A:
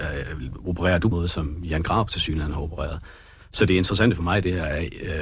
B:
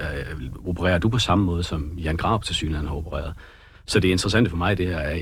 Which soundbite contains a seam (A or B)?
A